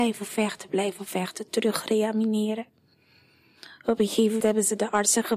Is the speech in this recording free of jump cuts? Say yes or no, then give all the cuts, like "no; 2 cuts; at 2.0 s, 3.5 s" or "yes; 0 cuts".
no; 1 cut; at 4.4 s